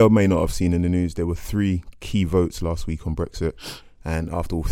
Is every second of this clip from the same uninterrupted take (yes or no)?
yes